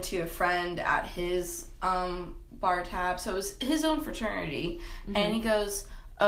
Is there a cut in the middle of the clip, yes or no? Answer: no